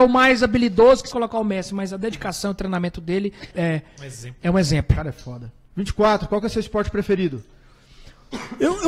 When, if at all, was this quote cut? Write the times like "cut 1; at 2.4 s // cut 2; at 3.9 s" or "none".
cut 1; at 1.1 s // cut 2; at 3.5 s // cut 3; at 5.7 s